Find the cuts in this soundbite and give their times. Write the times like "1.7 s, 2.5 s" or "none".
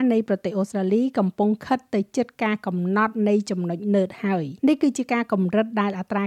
4.6 s